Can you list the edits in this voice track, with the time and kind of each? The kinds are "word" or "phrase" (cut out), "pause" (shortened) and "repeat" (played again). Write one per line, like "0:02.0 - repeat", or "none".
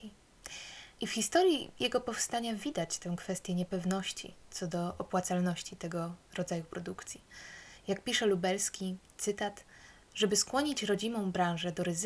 0:00.9 - pause
0:09.1 - word